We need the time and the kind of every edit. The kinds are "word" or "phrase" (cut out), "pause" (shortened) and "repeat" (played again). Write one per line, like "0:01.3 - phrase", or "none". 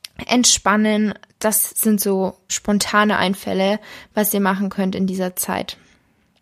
0:02.5 - word